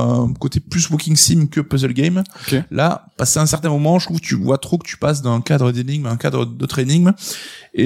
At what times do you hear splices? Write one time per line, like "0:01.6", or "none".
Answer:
none